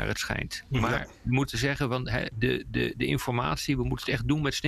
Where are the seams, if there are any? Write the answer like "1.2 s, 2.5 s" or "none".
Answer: 2.3 s

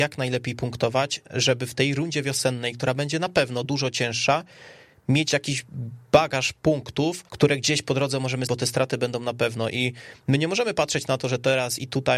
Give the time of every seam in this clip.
3.6 s, 7.3 s, 8.5 s

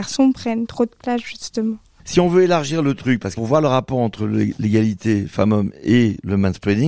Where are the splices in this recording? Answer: 3.4 s

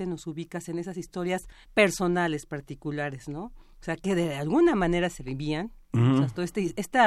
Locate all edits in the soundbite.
1.6 s

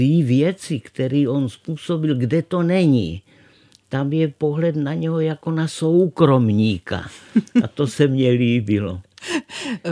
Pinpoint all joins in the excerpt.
none

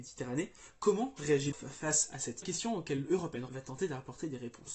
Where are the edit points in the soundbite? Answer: 1.5 s, 2.4 s, 3.5 s

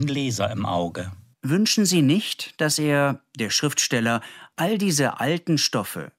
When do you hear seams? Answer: 1.2 s, 4.5 s

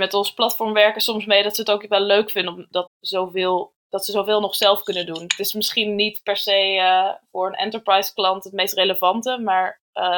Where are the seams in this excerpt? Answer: 2.9 s

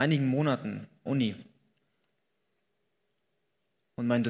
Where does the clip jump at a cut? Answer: 1.1 s

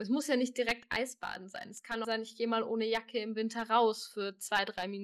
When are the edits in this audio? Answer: 2.0 s

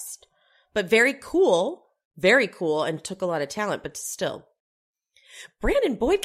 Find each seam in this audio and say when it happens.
none

